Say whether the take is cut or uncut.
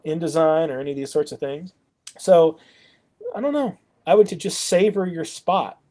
cut